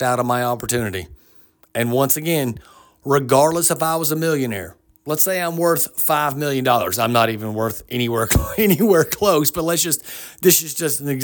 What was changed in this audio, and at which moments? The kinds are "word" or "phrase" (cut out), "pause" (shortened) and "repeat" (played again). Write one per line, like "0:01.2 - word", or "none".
none